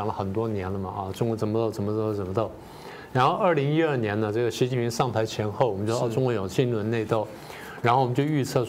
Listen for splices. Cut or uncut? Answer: uncut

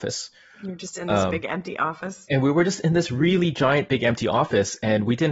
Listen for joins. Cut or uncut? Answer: uncut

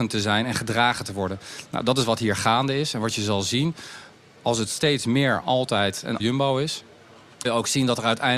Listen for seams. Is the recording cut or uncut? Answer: cut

